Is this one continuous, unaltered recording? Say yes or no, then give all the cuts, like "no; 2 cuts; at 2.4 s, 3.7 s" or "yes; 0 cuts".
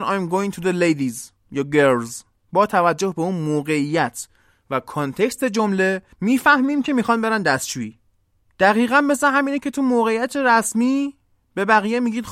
yes; 0 cuts